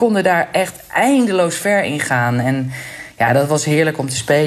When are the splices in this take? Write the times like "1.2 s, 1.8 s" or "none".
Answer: none